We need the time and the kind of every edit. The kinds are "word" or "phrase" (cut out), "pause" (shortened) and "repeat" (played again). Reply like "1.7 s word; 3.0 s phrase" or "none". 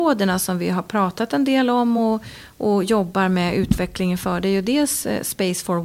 none